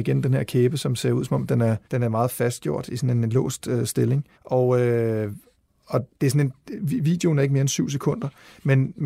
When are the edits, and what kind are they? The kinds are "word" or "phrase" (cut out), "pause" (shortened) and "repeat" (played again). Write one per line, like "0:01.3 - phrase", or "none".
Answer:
0:01.8 - pause
0:04.3 - pause
0:06.1 - pause